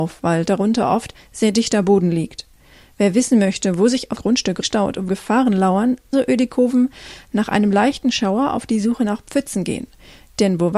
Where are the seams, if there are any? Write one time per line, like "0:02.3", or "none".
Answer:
0:04.2
0:04.6
0:05.1
0:06.1